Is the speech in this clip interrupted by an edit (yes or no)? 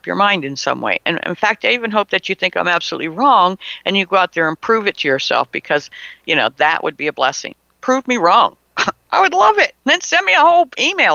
yes